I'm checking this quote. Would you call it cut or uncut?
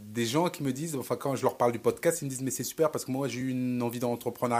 uncut